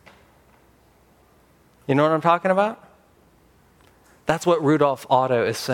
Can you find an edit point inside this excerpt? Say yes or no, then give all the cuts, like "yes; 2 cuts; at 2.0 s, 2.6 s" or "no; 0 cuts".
no; 0 cuts